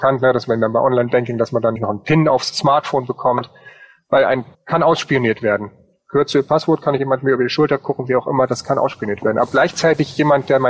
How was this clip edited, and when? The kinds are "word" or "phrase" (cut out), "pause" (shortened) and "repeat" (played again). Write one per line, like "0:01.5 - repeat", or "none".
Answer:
0:01.8 - word
0:04.5 - word
0:07.0 - phrase
0:09.5 - word